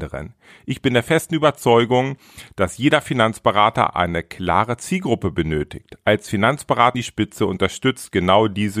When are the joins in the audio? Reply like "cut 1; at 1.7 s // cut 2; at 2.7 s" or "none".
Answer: cut 1; at 6.9 s